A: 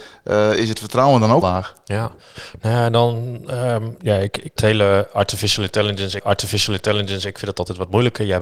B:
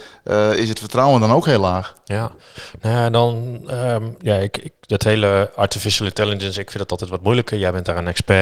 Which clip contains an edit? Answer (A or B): A